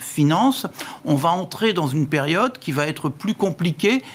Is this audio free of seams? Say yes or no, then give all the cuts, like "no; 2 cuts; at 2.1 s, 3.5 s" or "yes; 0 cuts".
yes; 0 cuts